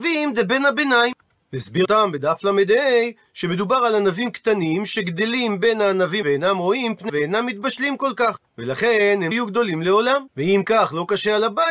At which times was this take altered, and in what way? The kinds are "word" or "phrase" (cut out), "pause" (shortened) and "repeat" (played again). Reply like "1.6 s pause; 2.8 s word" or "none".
1.8 s word; 6.2 s word; 7.1 s word; 8.5 s pause; 9.3 s word; 10.3 s pause

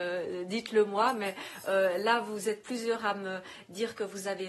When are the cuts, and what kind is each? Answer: none

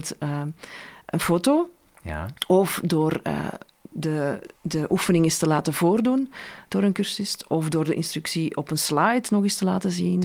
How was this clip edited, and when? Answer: 4.6 s pause

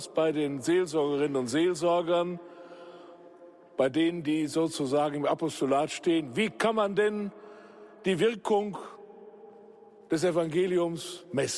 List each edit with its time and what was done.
none

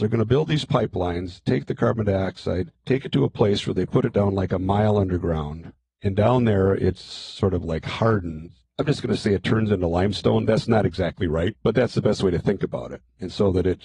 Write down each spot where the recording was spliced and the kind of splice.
none

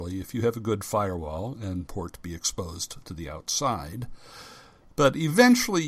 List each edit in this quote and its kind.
1.9 s phrase

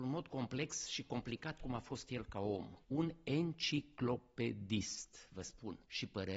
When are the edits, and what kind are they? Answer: 1.6 s word

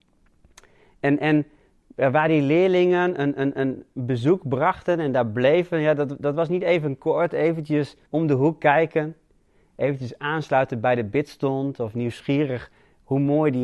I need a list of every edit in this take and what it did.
8.0 s pause

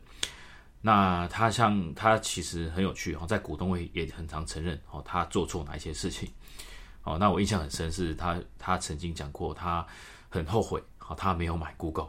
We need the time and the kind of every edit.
none

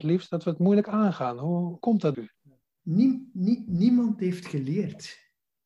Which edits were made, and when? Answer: 1.8 s word; 2.1 s word

